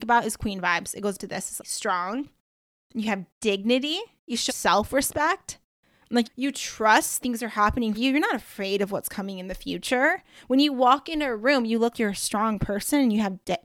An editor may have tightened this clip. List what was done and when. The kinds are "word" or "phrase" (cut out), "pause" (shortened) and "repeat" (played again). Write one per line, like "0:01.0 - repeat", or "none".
0:01.2 - word
0:01.6 - word
0:04.5 - word
0:06.2 - word
0:07.2 - word
0:07.9 - word
0:11.9 - word